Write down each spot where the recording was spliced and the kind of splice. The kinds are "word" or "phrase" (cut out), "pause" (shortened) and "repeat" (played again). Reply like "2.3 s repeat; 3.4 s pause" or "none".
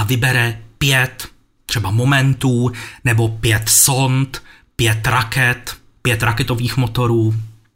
none